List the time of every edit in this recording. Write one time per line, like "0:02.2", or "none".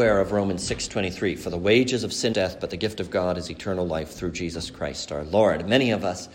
0:02.3

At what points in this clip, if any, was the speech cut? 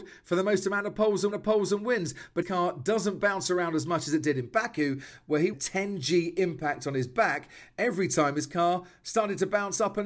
0:01.3
0:02.4
0:05.5

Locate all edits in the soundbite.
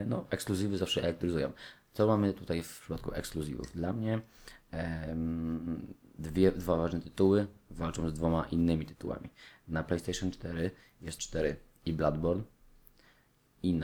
0:06.0
0:11.2

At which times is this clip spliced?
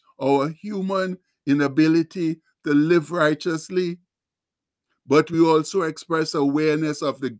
none

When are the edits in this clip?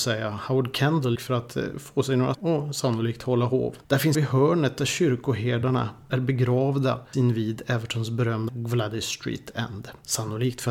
0:01.2
0:02.3
0:04.1
0:07.1
0:08.5

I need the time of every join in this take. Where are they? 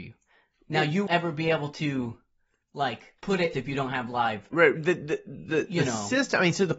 0:01.1
0:03.2
0:03.5
0:04.5

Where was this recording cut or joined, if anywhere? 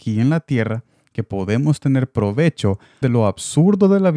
0:03.0

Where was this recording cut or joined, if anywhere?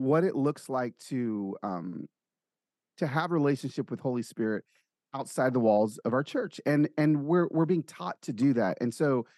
none

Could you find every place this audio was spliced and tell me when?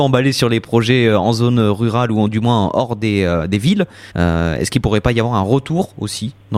0:04.1

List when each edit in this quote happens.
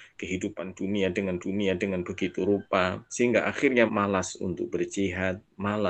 0:01.4
0:03.1
0:03.9

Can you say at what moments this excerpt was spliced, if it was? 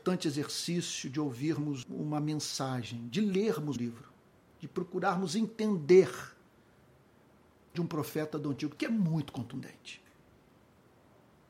0:01.8
0:03.8
0:07.7
0:08.8

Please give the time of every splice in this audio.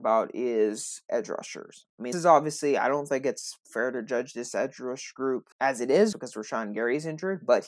0:02.1
0:03.6
0:05.5
0:06.1

